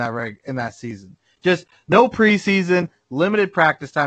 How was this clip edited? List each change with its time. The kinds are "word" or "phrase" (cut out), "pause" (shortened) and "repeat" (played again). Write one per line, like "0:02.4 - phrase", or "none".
none